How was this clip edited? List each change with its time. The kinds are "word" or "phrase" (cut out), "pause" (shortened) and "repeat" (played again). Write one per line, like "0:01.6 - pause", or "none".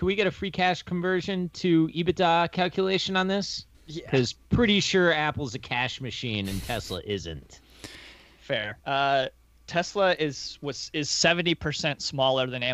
0:03.7 - pause
0:08.8 - pause